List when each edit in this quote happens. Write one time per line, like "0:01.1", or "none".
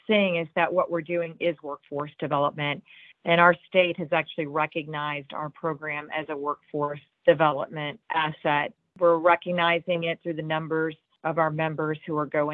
none

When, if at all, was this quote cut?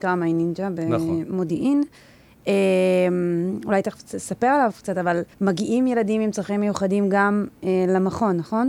0:05.3

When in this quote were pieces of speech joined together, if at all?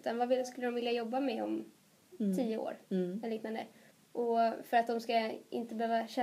0:02.8
0:03.9

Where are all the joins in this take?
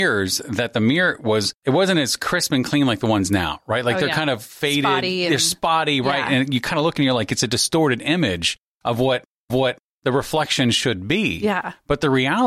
0:01.5
0:09.5

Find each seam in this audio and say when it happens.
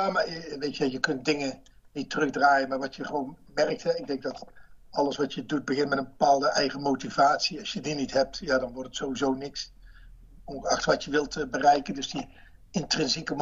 none

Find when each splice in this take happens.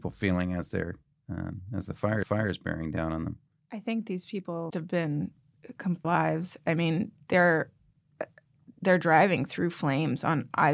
0:02.2
0:03.6
0:04.7
0:06.0
0:08.7

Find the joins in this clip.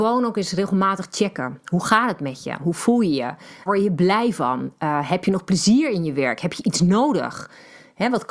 0:03.7

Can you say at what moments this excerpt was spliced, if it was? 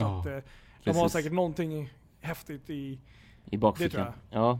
none

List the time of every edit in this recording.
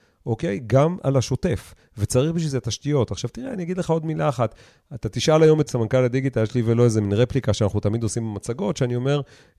0:05.7

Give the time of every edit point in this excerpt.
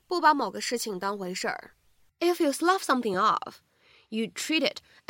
none

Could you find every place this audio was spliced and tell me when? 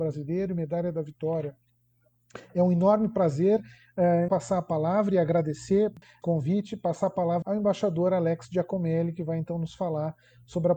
0:04.3
0:06.2
0:07.4

